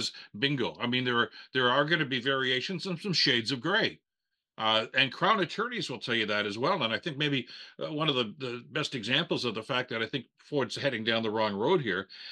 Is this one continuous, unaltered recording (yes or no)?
yes